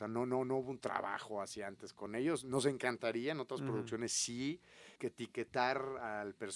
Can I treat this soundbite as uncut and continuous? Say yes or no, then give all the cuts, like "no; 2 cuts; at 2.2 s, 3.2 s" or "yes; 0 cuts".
no; 1 cut; at 5.0 s